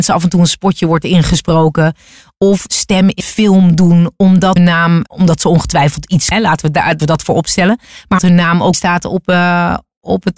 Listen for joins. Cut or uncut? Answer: cut